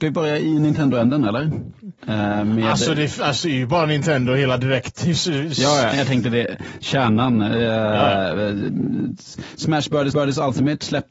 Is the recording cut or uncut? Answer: cut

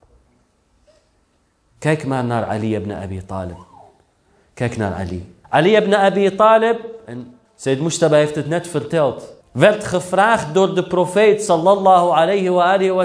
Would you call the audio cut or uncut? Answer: cut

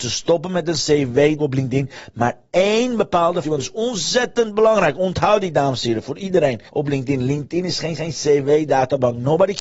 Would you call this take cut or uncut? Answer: cut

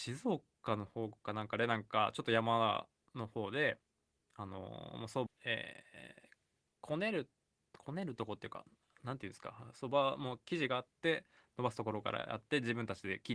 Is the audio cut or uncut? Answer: cut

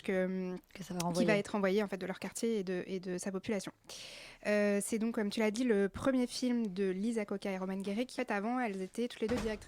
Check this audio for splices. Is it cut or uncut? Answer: cut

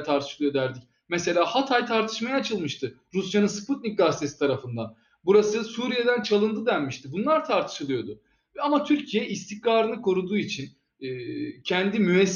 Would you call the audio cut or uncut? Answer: uncut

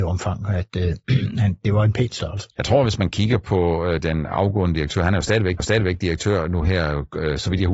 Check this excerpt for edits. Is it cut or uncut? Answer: cut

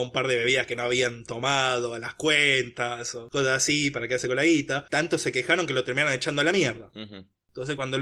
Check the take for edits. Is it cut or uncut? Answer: uncut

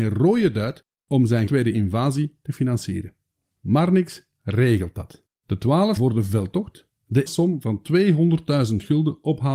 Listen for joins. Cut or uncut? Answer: cut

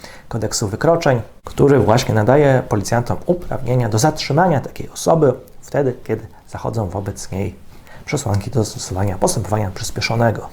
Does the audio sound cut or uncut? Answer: uncut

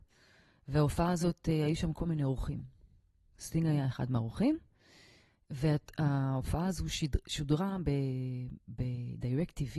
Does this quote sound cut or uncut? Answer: uncut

